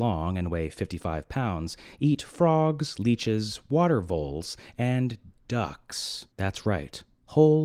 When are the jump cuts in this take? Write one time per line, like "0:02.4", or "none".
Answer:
0:06.3